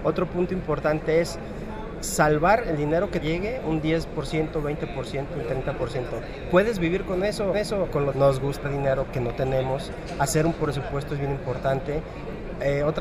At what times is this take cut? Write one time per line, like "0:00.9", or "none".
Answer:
0:03.2
0:07.5
0:08.1
0:08.6
0:09.1